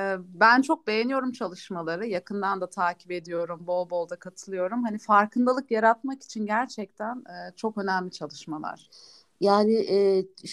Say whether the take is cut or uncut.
uncut